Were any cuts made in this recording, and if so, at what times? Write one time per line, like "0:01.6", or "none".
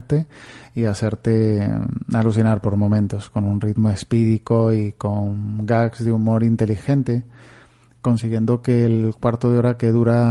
none